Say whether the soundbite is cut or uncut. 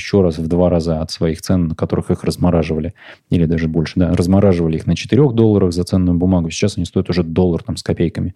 uncut